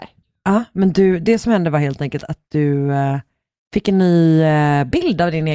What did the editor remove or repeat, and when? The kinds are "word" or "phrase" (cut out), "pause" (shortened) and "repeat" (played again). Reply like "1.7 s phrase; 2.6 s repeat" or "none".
none